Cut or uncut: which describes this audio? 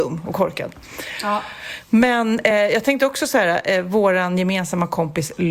uncut